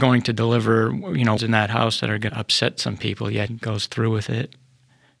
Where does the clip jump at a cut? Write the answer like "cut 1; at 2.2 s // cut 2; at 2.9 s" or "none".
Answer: cut 1; at 1.4 s // cut 2; at 2.3 s // cut 3; at 3.5 s